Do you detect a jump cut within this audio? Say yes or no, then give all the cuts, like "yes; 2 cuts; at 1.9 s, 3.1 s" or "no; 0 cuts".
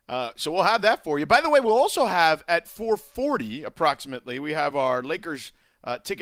no; 0 cuts